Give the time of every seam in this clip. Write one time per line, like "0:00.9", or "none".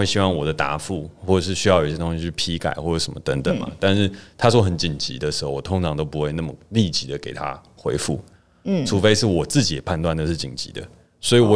none